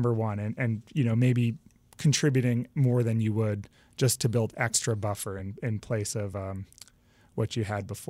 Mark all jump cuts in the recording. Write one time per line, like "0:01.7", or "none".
none